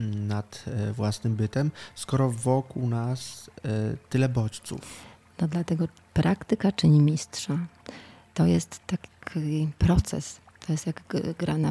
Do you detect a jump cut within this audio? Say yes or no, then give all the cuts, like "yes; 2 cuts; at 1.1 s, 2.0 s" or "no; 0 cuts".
no; 0 cuts